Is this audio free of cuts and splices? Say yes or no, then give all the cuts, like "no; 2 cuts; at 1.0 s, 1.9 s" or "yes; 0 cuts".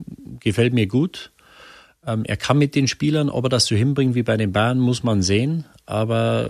yes; 0 cuts